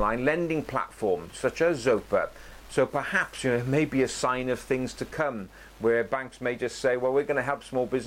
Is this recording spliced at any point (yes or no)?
no